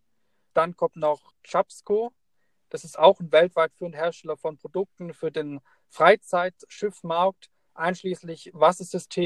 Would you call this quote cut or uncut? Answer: uncut